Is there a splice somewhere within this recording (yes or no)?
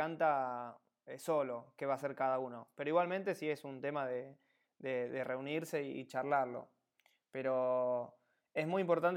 no